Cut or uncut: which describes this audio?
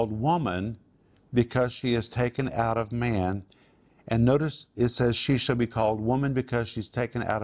uncut